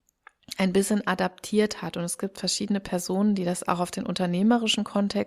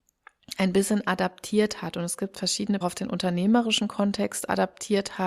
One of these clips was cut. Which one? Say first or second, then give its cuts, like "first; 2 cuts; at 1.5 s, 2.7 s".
second; 1 cut; at 2.8 s